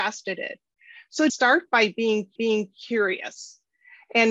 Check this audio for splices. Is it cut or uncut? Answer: cut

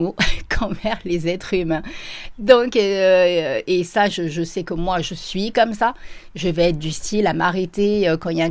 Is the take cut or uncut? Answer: uncut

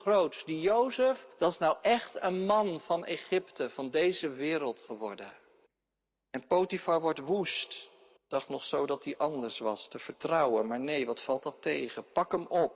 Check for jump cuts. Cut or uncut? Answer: cut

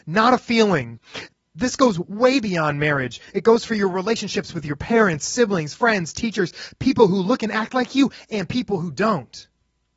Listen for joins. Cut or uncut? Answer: uncut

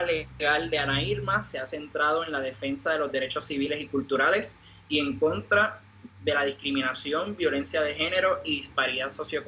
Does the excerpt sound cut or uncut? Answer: uncut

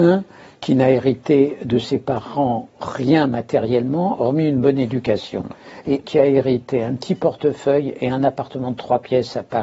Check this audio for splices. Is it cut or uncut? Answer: cut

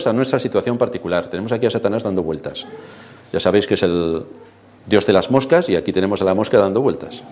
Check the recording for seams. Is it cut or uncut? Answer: uncut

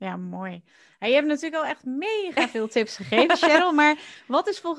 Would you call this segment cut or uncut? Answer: uncut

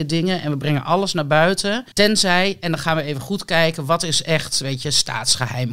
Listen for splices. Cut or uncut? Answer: cut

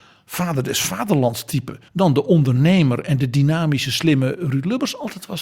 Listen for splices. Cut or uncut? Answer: cut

